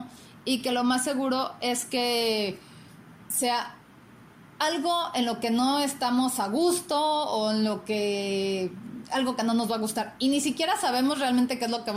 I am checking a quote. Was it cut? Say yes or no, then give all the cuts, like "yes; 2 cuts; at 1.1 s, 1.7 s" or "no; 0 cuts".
no; 0 cuts